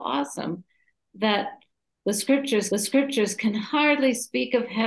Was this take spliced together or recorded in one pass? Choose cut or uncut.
cut